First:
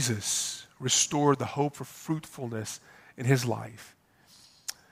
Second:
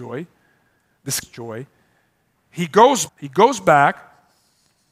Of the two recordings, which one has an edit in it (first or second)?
second